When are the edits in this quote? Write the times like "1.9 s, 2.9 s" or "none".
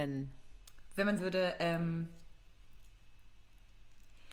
1.2 s